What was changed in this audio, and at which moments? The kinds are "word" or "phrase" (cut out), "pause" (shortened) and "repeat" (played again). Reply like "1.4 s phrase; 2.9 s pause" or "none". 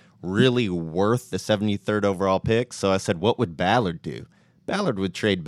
none